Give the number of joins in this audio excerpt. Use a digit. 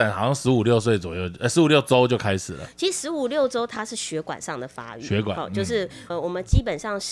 1